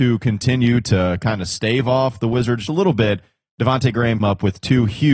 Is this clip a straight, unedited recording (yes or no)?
no